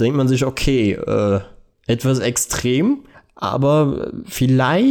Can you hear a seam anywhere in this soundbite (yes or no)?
yes